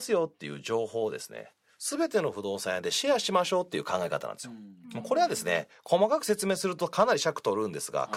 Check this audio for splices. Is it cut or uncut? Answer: uncut